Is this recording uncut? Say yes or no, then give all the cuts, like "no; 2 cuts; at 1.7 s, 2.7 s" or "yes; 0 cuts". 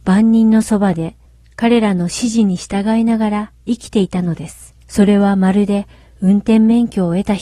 no; 1 cut; at 4.8 s